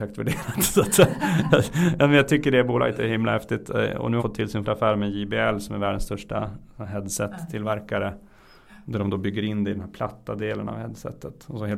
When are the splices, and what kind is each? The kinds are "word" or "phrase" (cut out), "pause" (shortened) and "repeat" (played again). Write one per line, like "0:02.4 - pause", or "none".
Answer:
0:04.2 - word
0:04.6 - word